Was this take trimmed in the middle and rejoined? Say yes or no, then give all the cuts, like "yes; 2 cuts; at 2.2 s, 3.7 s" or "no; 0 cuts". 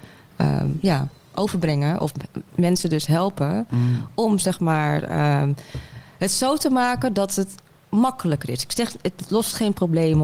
yes; 1 cut; at 2.5 s